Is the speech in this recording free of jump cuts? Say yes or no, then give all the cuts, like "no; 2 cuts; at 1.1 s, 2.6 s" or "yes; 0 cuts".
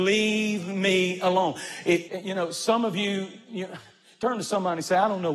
no; 1 cut; at 2.1 s